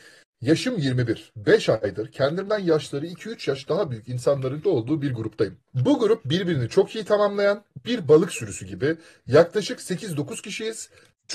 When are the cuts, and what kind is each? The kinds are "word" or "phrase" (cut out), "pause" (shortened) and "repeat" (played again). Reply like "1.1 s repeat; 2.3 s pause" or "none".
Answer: 4.6 s word